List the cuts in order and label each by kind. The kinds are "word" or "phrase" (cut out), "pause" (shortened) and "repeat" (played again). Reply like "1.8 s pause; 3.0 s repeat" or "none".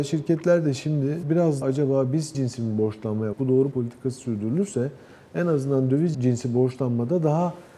1.2 s word; 1.6 s word; 2.3 s word; 3.3 s word; 3.7 s word; 6.1 s word